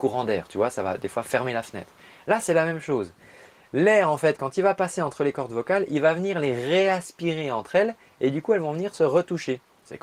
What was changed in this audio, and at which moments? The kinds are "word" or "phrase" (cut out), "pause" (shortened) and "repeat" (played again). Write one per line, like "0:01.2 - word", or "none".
none